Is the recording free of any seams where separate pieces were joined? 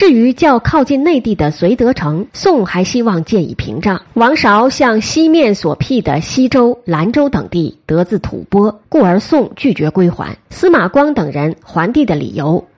no; 4 cuts; at 2.3 s, 4.1 s, 8.8 s, 10.5 s

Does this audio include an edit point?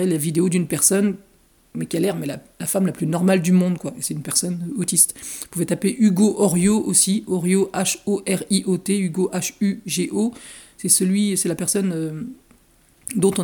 no; 0 cuts

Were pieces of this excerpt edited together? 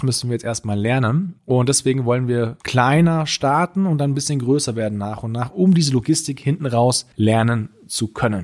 yes; 3 cuts; at 1.4 s, 2.6 s, 7.1 s

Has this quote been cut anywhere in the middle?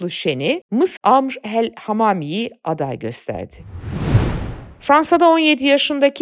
yes; 1 cut; at 1.0 s

